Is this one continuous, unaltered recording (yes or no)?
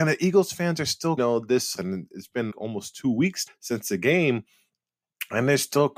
no